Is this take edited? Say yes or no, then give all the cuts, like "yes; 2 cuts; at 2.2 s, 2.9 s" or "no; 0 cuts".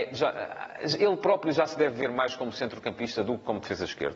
no; 0 cuts